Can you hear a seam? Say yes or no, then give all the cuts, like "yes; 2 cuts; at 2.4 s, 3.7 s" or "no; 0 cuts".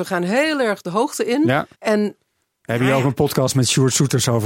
yes; 1 cut; at 1.7 s